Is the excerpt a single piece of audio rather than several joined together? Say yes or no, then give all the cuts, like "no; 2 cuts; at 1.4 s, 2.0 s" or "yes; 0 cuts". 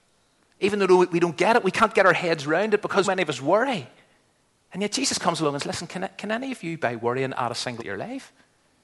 no; 4 cuts; at 3.0 s, 4.5 s, 5.6 s, 7.8 s